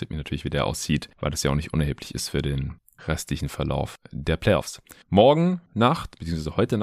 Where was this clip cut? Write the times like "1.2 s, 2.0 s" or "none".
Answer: none